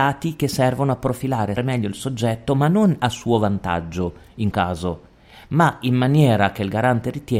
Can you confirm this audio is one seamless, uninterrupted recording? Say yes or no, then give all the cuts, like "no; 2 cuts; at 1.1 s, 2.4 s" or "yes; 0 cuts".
no; 2 cuts; at 1.6 s, 4.5 s